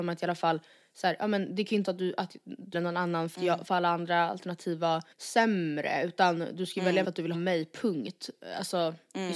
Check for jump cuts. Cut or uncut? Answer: cut